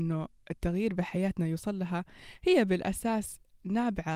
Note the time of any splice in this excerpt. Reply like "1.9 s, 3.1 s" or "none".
none